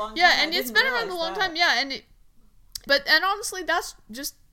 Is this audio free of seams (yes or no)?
no